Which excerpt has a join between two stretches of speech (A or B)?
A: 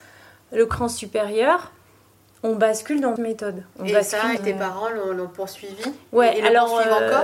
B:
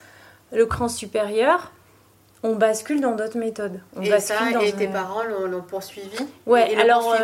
A